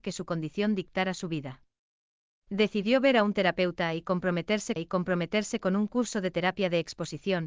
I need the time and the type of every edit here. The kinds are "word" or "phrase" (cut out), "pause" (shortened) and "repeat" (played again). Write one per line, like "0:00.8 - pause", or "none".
0:04.8 - repeat